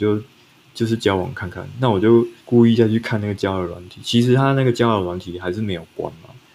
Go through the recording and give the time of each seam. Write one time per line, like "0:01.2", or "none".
0:02.4